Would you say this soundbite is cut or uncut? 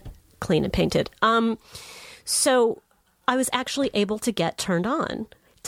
uncut